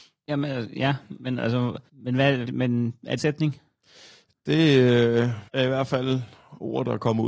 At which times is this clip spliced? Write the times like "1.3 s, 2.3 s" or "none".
1.9 s, 2.4 s, 3.2 s, 5.5 s